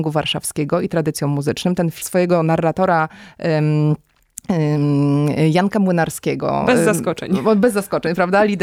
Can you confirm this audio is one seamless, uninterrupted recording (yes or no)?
no